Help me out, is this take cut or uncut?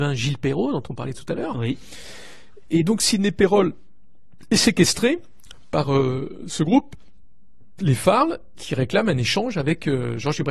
cut